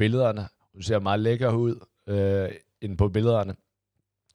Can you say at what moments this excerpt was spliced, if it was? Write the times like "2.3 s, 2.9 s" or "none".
none

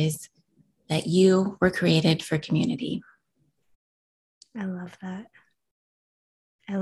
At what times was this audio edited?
none

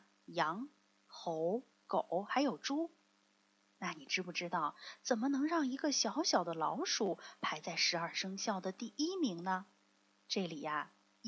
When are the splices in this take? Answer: 1.7 s

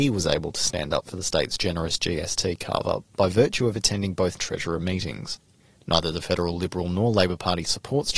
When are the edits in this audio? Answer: 4.4 s

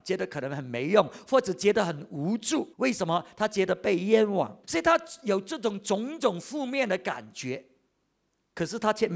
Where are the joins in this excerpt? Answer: 2.7 s, 4.6 s

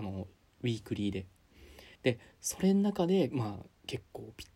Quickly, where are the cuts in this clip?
1.9 s

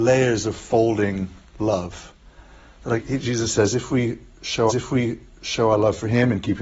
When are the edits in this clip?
3.0 s, 4.7 s

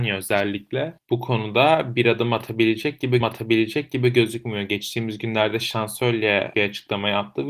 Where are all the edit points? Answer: 3.2 s, 6.5 s

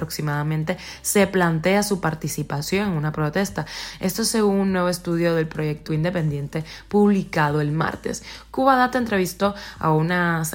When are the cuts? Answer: 5.9 s

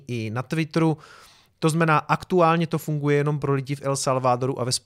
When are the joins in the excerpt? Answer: none

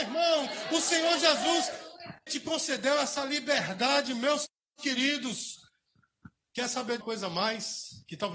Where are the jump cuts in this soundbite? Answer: 2.3 s, 4.6 s, 7.0 s

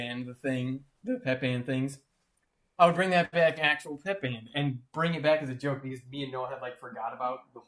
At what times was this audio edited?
3.6 s

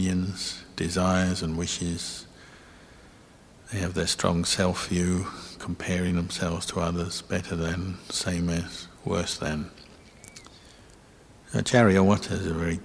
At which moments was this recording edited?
none

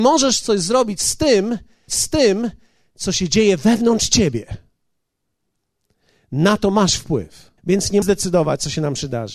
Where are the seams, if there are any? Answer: 1.9 s, 7.6 s, 8.0 s

